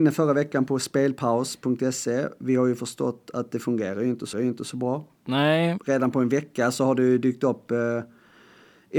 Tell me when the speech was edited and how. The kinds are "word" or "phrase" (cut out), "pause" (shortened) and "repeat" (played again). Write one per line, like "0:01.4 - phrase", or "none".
0:04.3 - repeat

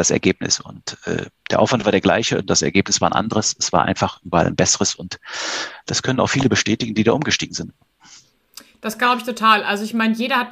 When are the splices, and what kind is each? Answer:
none

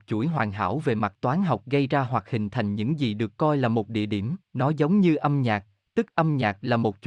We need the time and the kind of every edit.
0:04.4 - pause

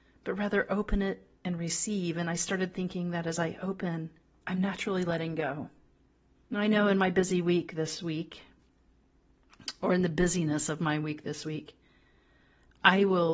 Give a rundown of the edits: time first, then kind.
0:01.3 - pause
0:04.2 - pause
0:06.0 - pause

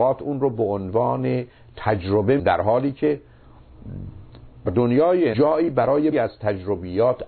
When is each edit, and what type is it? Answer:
0:02.4 - word
0:04.7 - word
0:05.3 - word
0:06.1 - word

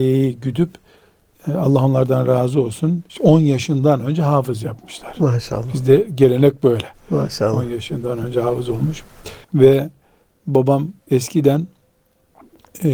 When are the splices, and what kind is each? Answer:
0:03.1 - pause
0:09.4 - pause
0:11.0 - pause

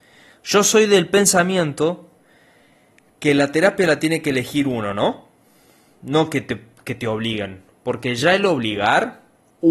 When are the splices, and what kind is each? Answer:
none

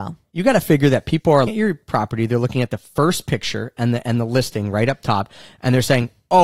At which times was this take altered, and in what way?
0:01.5 - word

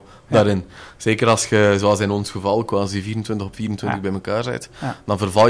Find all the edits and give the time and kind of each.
none

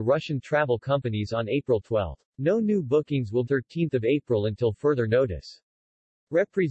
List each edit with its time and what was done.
0:02.3 - pause
0:03.4 - phrase

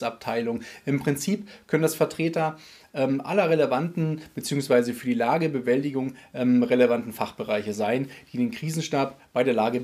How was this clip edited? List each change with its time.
none

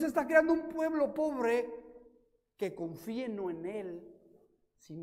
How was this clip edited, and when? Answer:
none

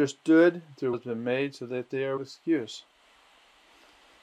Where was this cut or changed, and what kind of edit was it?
0:00.9 - word
0:02.2 - word

